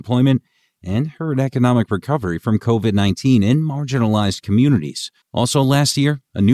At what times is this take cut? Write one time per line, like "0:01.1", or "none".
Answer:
0:05.2